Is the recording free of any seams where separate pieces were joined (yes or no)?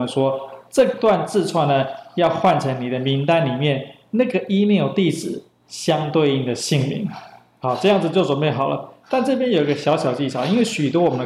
yes